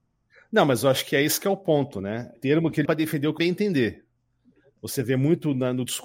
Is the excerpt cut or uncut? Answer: cut